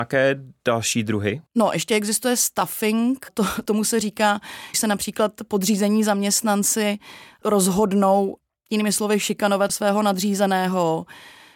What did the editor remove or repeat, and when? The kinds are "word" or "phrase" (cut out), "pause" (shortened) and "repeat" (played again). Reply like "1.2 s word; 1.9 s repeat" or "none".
1.5 s pause; 3.3 s word; 4.7 s word